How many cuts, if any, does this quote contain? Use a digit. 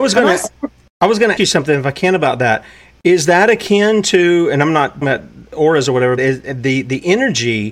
3